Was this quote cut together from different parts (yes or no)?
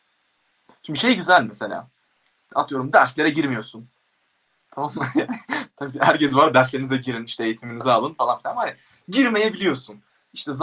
no